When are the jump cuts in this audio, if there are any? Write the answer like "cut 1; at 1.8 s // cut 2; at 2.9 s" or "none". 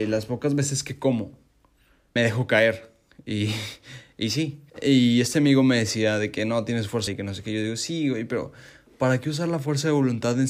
cut 1; at 2.2 s // cut 2; at 4.7 s // cut 3; at 7.1 s